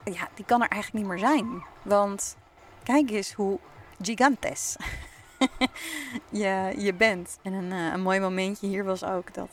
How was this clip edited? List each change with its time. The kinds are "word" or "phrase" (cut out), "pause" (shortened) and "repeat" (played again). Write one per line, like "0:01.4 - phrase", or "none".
none